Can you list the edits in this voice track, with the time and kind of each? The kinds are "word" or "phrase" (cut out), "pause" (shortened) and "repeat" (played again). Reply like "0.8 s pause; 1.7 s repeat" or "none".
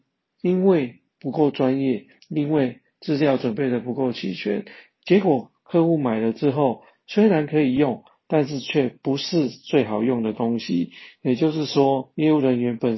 none